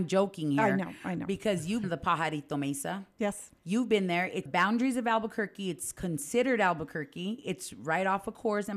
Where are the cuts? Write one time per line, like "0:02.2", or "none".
0:01.8
0:03.6
0:04.5